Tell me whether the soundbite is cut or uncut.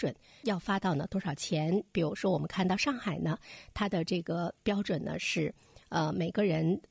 uncut